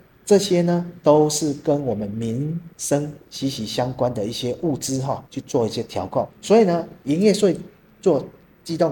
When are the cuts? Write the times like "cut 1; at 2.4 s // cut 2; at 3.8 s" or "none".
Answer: cut 1; at 2.7 s // cut 2; at 5.3 s // cut 3; at 6.3 s